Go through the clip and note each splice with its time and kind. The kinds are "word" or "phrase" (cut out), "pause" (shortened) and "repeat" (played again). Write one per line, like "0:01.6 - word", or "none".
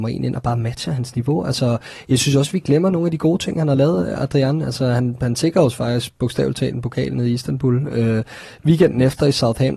none

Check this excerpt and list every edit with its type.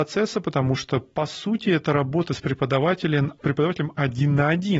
0:03.4 - pause

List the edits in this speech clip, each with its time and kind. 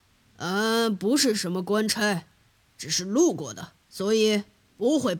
0:03.8 - pause

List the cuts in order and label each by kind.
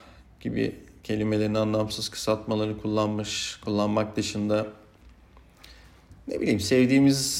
none

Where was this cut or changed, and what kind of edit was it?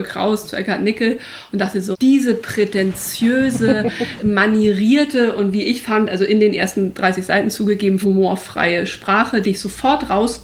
0:01.9 - word
0:04.2 - word
0:08.0 - word
0:09.4 - word

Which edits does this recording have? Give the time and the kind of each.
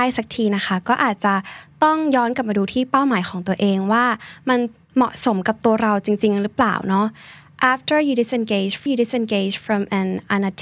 0:08.9 - repeat

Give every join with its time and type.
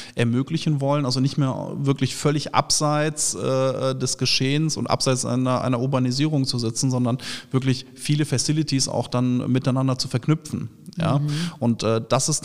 none

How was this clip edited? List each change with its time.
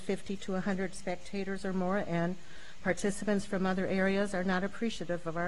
none

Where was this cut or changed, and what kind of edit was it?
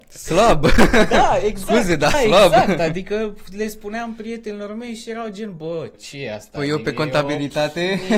0:02.1 - word
0:05.9 - phrase

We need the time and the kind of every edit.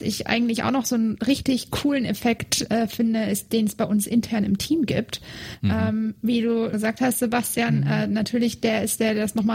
0:06.7 - word

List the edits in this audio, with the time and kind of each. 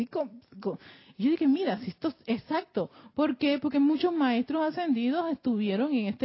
none

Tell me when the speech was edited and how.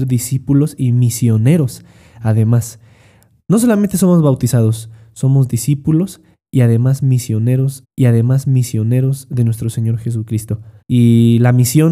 0:07.8 - repeat
0:10.8 - pause

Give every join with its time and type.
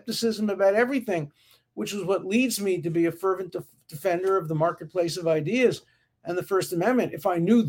none

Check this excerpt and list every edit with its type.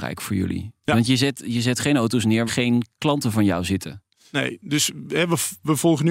0:02.5 - word

